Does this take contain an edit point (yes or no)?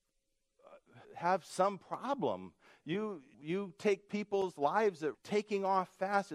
yes